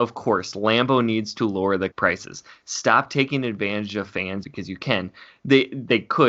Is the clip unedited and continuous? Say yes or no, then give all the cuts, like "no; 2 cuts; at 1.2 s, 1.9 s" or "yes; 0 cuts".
no; 2 cuts; at 1.9 s, 4.4 s